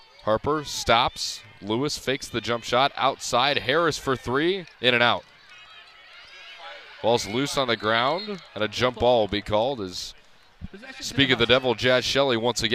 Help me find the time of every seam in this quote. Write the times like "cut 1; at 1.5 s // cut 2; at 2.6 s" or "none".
cut 1; at 4.7 s // cut 2; at 8.5 s